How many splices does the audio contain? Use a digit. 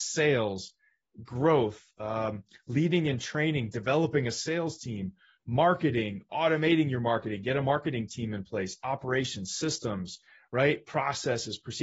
0